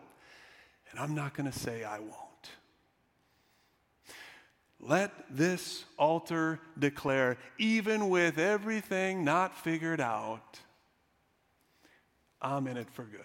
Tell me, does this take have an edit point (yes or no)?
no